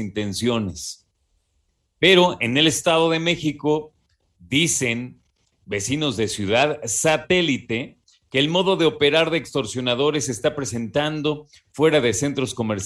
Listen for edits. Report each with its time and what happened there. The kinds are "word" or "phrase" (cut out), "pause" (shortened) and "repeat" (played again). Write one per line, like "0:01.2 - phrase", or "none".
none